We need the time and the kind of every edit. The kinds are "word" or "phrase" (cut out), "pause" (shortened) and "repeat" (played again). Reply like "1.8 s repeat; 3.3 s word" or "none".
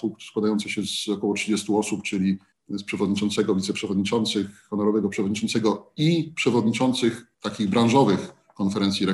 2.5 s pause; 7.3 s pause